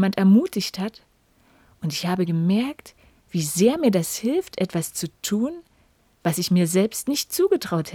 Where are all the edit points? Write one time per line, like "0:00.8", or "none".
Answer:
none